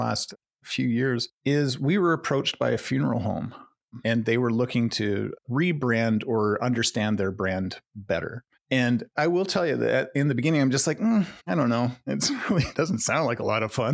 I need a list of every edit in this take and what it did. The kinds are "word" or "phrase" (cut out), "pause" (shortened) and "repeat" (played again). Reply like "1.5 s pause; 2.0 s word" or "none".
1.3 s pause; 11.4 s pause; 12.7 s word